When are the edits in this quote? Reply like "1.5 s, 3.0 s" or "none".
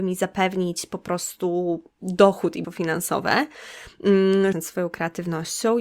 1.9 s, 2.6 s, 4.5 s